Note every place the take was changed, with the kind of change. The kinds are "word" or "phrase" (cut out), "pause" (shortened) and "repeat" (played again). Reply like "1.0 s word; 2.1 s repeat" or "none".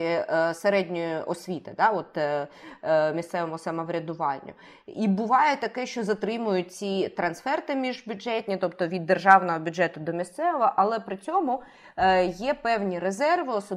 none